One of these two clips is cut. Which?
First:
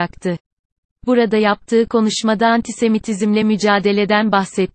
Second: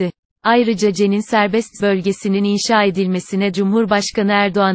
second; 2 cuts; at 1.8 s, 3.5 s

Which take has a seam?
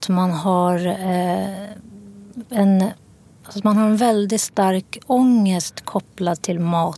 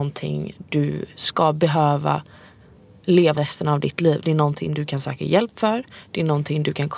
second; 1 cut; at 3.4 s

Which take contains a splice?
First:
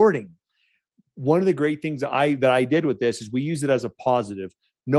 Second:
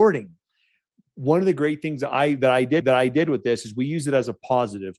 second; 1 cut; at 2.8 s

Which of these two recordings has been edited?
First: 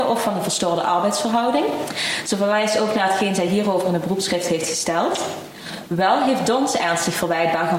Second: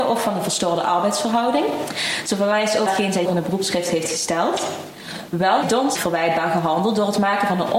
second; 4 cuts; at 2.9 s, 3.2 s, 5.6 s, 5.9 s

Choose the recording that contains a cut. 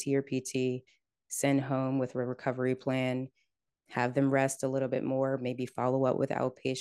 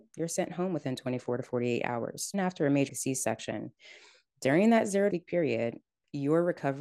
second; 3 cuts; at 2.3 s, 2.9 s, 5.1 s

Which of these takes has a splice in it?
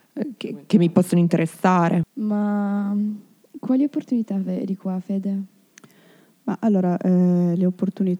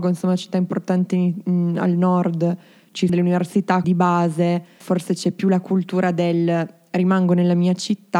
second; 3 cuts; at 3.1 s, 3.8 s, 4.8 s

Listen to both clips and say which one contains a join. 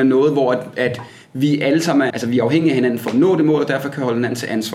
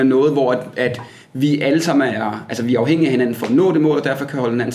first; 1 cut; at 2.1 s

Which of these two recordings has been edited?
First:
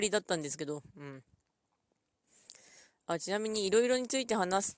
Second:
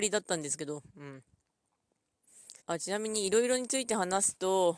second; 1 cut; at 2.6 s

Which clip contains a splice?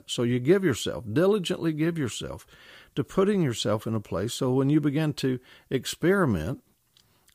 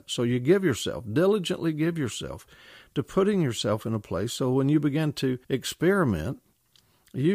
second; 1 cut; at 5.4 s

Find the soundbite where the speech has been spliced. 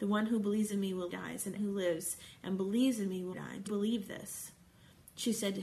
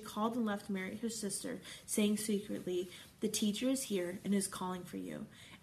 first; 4 cuts; at 1.1 s, 1.6 s, 3.3 s, 3.7 s

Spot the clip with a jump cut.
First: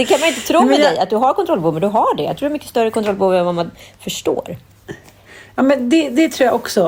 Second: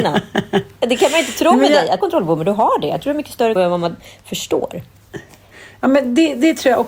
second; 2 cuts; at 2.0 s, 3.6 s

